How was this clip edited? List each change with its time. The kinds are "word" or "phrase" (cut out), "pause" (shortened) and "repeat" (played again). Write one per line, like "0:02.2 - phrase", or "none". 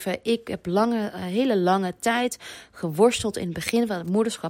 none